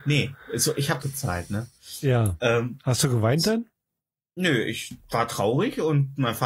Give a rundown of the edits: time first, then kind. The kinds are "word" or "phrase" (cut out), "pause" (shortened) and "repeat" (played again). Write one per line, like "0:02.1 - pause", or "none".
0:01.0 - phrase